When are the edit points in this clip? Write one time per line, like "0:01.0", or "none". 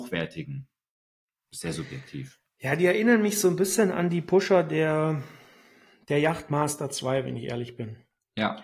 none